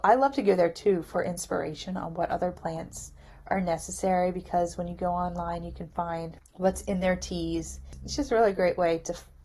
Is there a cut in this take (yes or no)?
no